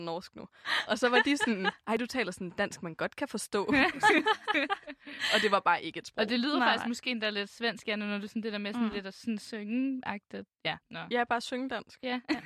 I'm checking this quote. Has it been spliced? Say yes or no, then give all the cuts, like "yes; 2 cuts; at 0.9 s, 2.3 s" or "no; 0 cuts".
no; 0 cuts